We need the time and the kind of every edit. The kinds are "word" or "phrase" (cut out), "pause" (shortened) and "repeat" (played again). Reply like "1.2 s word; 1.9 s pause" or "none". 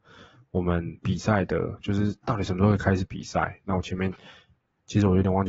1.0 s pause